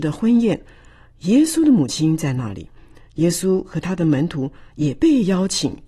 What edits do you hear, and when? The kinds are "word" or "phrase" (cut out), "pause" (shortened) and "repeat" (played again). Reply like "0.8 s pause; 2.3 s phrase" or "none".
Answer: none

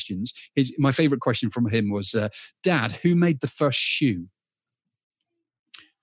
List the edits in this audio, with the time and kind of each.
none

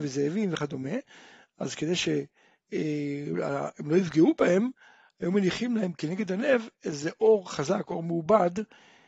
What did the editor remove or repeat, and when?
none

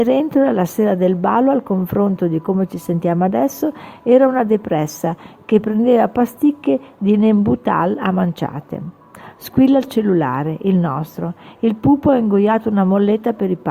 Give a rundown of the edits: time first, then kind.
none

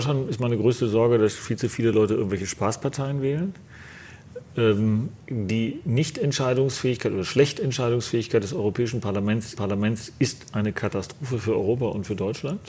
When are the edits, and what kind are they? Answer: 5.2 s pause; 9.6 s repeat

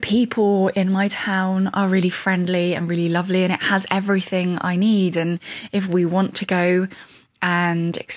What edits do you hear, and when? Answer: none

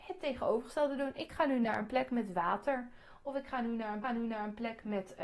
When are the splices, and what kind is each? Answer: 4.0 s repeat

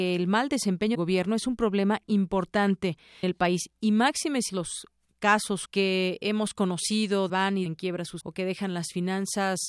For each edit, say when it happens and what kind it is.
0.9 s word; 3.2 s word; 4.5 s word; 5.6 s word; 7.3 s phrase; 7.7 s word; 8.2 s word

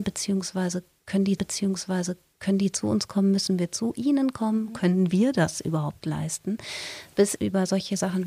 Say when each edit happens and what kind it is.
1.4 s repeat; 7.4 s word

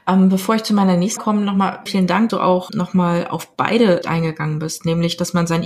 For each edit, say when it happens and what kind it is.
1.2 s word; 1.9 s word; 2.3 s word; 2.7 s word; 4.0 s word

